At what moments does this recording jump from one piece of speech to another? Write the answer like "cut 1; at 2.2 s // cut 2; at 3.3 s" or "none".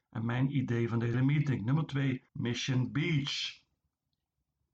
cut 1; at 1.1 s // cut 2; at 2.3 s